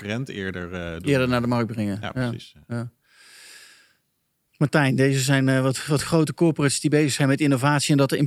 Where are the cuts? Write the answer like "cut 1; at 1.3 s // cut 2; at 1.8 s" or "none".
none